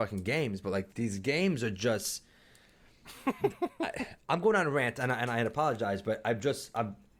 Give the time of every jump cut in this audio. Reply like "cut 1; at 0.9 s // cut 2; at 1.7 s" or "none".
cut 1; at 0.9 s

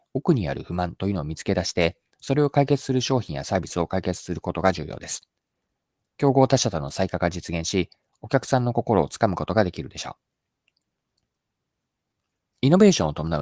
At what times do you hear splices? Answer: none

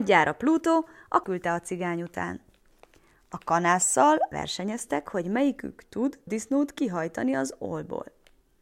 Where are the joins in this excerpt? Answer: cut 1; at 1.2 s // cut 2; at 4.3 s // cut 3; at 6.3 s

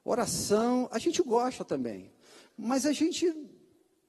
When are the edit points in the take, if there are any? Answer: none

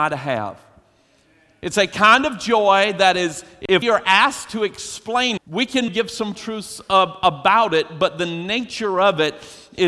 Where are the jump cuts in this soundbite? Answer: cut 1; at 3.8 s // cut 2; at 5.4 s // cut 3; at 5.9 s // cut 4; at 6.3 s

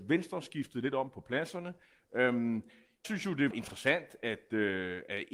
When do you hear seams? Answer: cut 1; at 3.0 s // cut 2; at 3.5 s

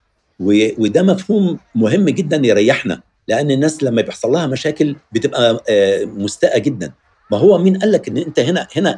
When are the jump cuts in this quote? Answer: none

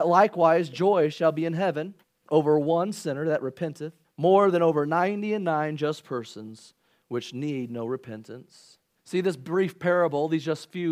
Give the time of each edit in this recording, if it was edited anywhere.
cut 1; at 2.0 s // cut 2; at 4.0 s // cut 3; at 9.0 s

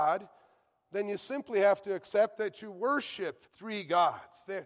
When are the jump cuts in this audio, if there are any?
cut 1; at 3.5 s

